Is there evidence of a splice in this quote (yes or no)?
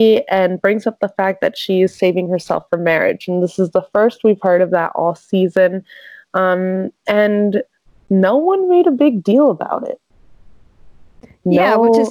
no